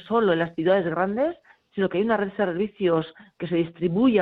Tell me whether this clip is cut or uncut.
uncut